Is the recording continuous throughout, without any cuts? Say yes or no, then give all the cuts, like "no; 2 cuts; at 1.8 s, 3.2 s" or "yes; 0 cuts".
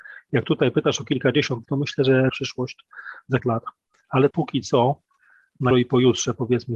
no; 5 cuts; at 1.6 s, 2.3 s, 3.4 s, 4.3 s, 5.7 s